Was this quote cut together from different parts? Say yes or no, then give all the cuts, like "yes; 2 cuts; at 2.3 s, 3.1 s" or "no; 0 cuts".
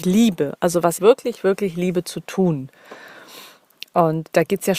yes; 1 cut; at 1.0 s